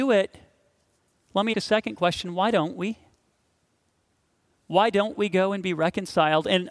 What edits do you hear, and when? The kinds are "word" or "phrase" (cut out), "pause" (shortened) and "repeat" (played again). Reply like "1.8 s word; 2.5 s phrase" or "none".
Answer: 1.5 s word